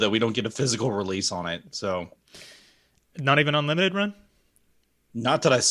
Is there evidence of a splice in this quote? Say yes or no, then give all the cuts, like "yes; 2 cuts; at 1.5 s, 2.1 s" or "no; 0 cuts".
yes; 1 cut; at 3.1 s